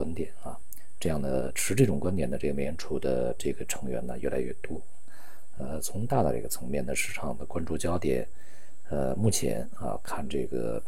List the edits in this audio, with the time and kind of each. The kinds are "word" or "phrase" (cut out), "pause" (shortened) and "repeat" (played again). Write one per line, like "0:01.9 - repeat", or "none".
none

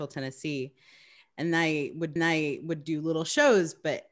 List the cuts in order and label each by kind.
0:02.2 - repeat

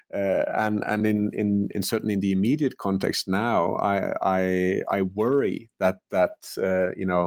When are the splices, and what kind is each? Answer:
none

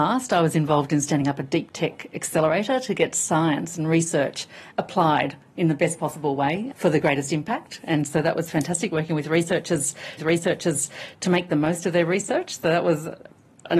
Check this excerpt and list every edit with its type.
0:06.7 - word
0:10.2 - repeat

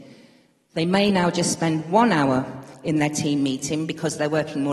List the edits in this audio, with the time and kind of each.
none

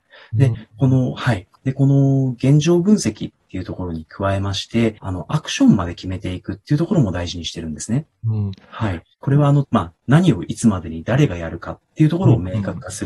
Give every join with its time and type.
0:01.5 - pause
0:05.0 - pause
0:09.1 - pause
0:09.6 - phrase

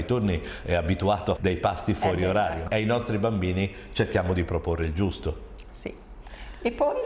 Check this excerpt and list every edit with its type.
0:01.4 - word
0:02.7 - word

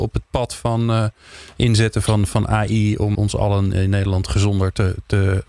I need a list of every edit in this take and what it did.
0:03.1 - word

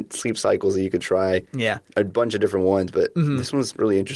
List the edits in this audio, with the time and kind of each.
0:01.9 - word

